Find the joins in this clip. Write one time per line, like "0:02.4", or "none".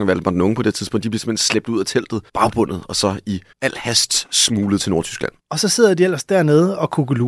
0:02.3
0:03.5
0:05.4